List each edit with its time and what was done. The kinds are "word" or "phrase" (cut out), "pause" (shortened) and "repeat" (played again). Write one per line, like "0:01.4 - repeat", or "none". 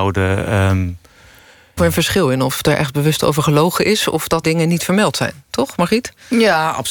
0:01.8 - phrase
0:02.6 - phrase
0:04.4 - word